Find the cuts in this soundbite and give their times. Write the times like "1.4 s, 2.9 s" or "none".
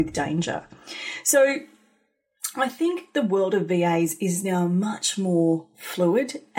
none